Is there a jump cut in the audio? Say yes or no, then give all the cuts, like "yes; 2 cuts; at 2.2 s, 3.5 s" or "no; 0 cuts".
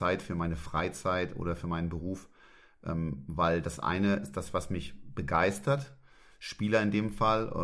no; 0 cuts